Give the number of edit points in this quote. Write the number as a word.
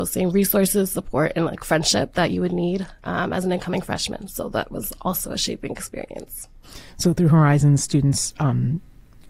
zero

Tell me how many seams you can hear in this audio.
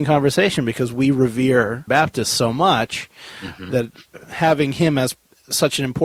one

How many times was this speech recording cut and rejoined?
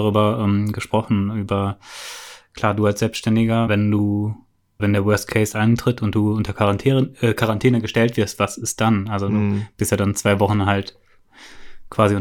two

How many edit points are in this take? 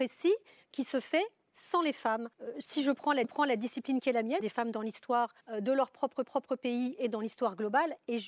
five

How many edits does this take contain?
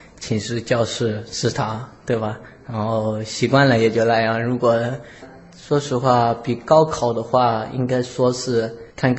zero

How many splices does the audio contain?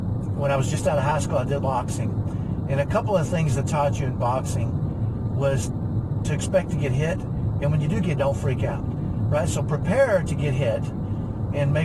three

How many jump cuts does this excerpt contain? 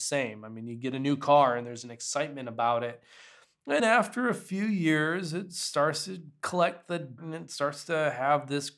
two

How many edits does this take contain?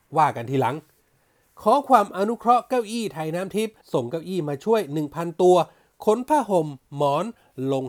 one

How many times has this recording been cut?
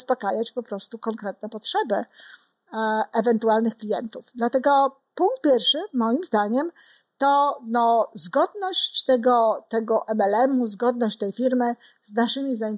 zero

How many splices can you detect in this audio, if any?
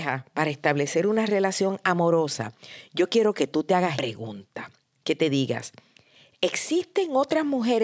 one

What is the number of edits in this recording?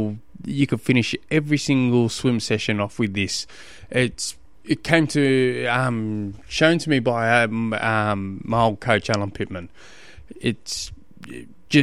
one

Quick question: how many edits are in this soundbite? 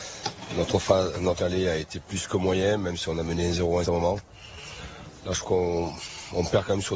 three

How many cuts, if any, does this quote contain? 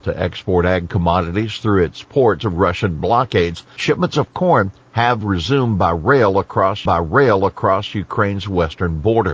three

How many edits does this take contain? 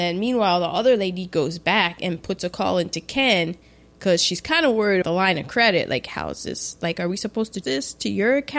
two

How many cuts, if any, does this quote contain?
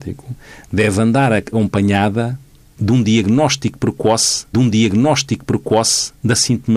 one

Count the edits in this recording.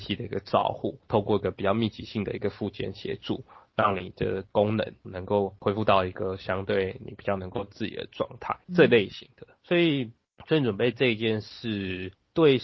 two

